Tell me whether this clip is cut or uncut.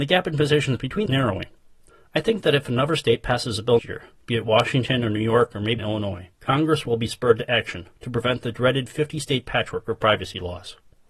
cut